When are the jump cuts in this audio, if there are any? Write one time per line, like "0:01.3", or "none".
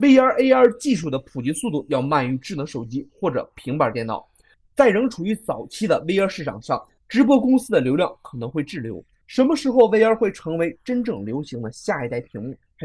none